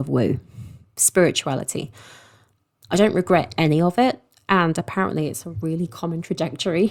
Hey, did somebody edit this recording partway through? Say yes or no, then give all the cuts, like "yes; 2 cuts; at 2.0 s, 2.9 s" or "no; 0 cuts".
no; 0 cuts